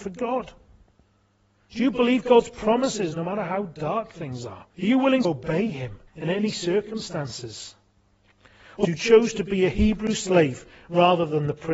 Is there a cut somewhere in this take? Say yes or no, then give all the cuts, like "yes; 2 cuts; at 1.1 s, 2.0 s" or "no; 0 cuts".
yes; 4 cuts; at 4.7 s, 5.2 s, 6.1 s, 8.8 s